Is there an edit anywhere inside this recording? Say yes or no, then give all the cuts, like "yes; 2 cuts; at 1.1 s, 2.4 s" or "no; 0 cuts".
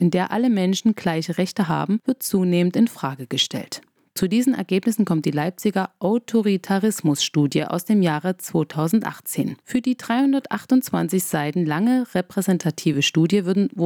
no; 0 cuts